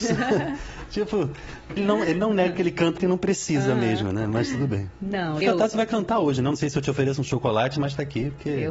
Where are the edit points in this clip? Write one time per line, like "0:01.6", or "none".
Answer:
0:01.8
0:03.0
0:05.4